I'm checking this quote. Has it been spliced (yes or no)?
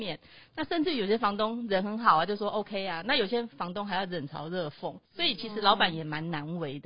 yes